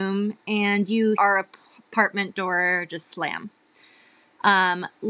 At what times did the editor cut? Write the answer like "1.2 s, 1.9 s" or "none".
1.2 s